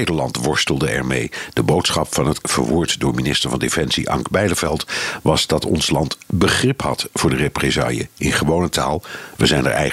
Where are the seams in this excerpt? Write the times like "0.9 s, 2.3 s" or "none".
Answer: 2.4 s